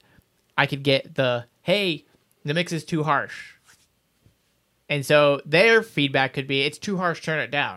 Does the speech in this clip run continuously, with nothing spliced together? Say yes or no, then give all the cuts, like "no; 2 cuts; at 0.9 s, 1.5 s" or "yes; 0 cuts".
yes; 0 cuts